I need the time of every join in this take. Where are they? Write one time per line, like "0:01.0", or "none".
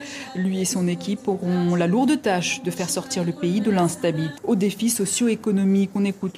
0:04.4

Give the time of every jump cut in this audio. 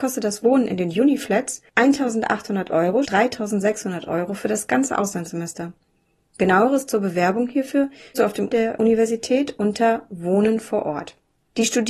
0:03.0
0:08.1
0:08.5

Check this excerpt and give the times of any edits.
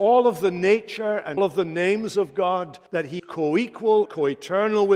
0:01.4
0:02.9
0:03.2
0:04.1

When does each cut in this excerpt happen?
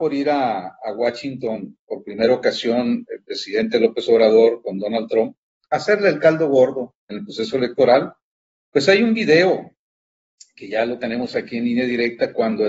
0:07.0

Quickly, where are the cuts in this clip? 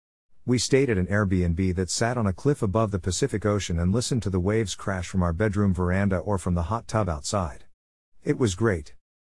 none

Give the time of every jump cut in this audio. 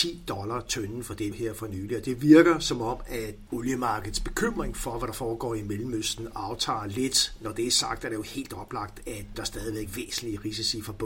0:01.3
0:03.5
0:09.3
0:09.9

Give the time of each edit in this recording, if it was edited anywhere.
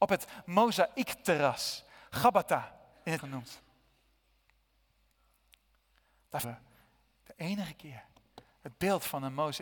0:03.2
0:06.4

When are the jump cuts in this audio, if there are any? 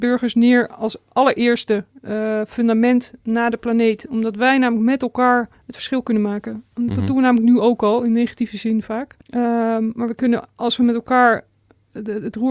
0:05.5
0:09.2

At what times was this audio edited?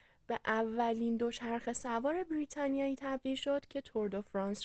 none

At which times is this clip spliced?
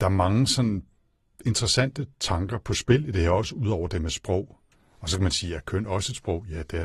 none

